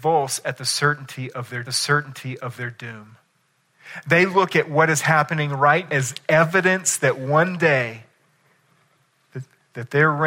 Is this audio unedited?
no; 2 cuts; at 1.6 s, 5.9 s

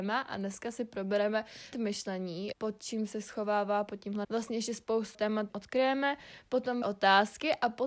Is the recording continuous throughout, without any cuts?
no; 6 cuts; at 1.7 s, 2.5 s, 4.2 s, 5.1 s, 5.5 s, 6.8 s

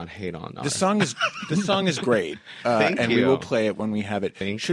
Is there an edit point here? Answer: no; 0 cuts

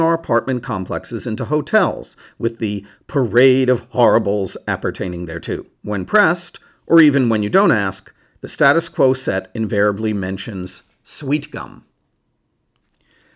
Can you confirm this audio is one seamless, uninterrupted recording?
no; 2 cuts; at 5.8 s, 8.3 s

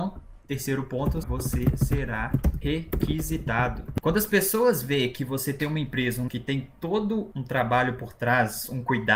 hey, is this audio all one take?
no; 2 cuts; at 1.2 s, 6.3 s

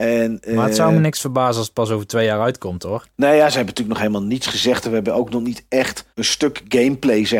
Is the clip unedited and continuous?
no; 1 cut; at 6.1 s

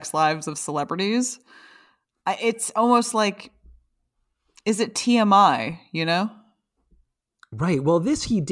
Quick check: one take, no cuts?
yes; 0 cuts

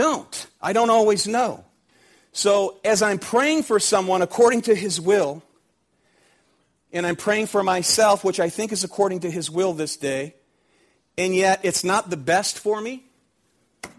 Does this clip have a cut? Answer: no; 0 cuts

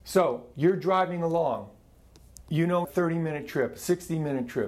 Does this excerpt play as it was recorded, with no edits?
no; 1 cut; at 2.8 s

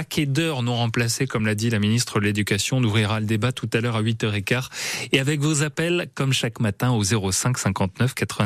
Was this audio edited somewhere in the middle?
no; 0 cuts

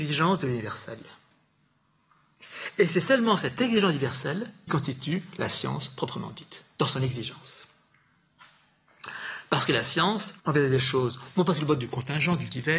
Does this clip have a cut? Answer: yes; 2 cuts; at 4.7 s, 10.4 s

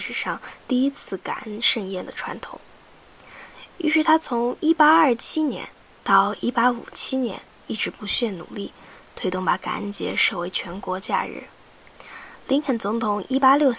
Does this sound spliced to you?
no; 0 cuts

